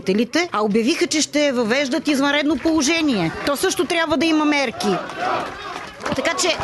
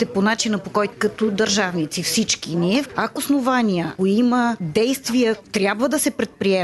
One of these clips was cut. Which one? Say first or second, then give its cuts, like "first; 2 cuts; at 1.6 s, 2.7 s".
second; 4 cuts; at 0.9 s, 3.2 s, 4.0 s, 5.4 s